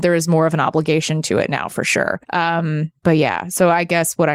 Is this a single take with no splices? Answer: no; 1 cut; at 2.2 s

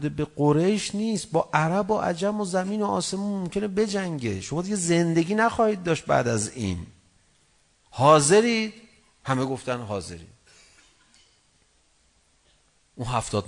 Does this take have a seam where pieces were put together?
no; 0 cuts

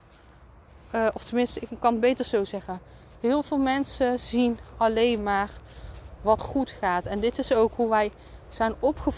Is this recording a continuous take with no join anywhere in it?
no; 1 cut; at 6.4 s

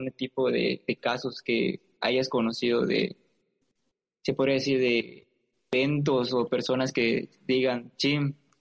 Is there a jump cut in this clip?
no; 0 cuts

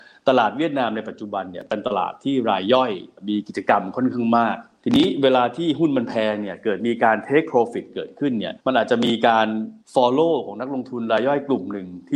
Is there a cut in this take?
yes; 2 cuts; at 8.6 s, 9.8 s

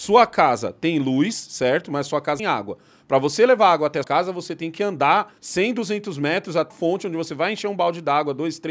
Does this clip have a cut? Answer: yes; 4 cuts; at 2.4 s, 4.0 s, 5.4 s, 6.7 s

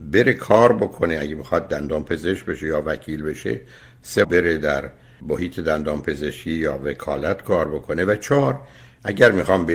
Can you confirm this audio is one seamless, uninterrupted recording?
no; 2 cuts; at 4.2 s, 5.2 s

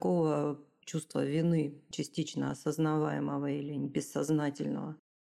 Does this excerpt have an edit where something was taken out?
no; 0 cuts

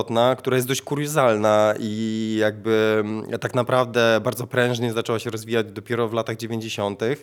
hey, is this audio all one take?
yes; 0 cuts

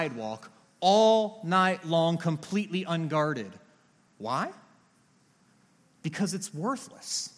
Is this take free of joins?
yes; 0 cuts

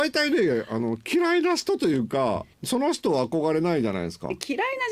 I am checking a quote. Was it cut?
yes; 1 cut; at 2.5 s

